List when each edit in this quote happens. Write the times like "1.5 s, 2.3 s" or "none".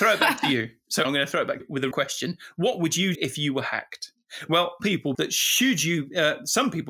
1.0 s, 1.6 s, 1.9 s, 3.1 s, 4.8 s, 5.1 s

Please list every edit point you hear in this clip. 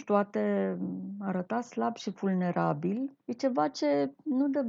3.2 s

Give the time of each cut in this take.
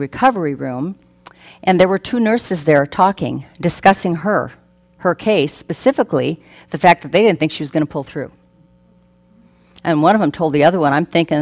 none

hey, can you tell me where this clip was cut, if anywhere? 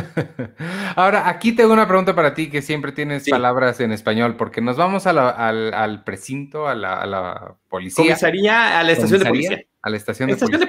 none

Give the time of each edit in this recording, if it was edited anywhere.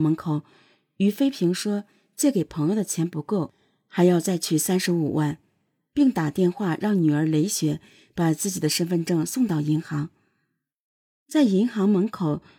none

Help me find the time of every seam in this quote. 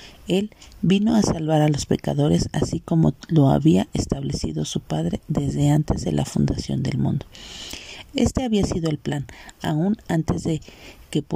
none

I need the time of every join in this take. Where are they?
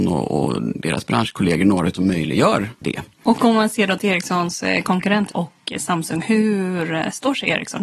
1.9 s, 2.8 s, 5.3 s

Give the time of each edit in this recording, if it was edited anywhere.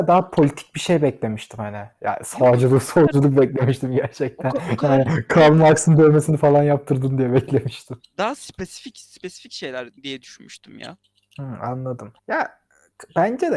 10.0 s, 11.0 s, 12.2 s

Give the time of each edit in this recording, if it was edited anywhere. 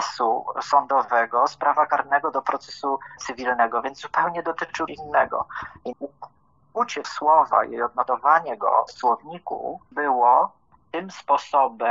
3.2 s, 4.9 s, 5.9 s, 7.0 s, 8.9 s, 9.9 s

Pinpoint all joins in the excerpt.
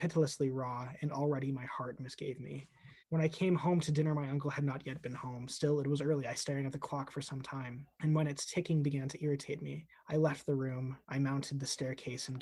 3.0 s, 6.3 s, 7.9 s, 9.9 s, 11.0 s

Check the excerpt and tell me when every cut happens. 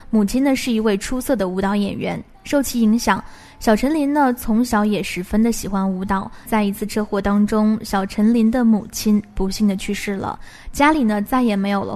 6.4 s

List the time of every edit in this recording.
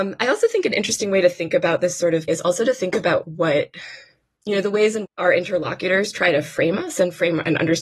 2.3 s, 3.2 s, 5.0 s

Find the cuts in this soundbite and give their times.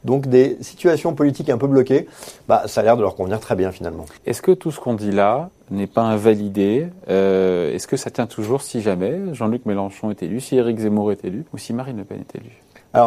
4.2 s, 11.5 s

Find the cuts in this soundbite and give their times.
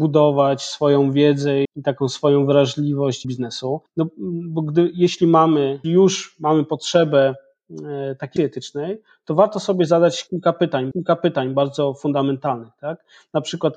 1.6 s, 3.2 s, 3.9 s, 5.8 s, 8.4 s, 10.9 s

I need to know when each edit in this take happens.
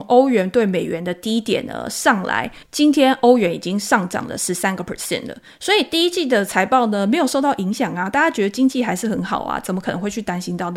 2.6 s

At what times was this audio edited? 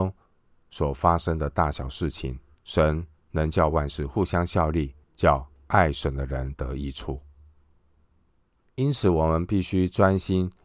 2.5 s, 5.0 s

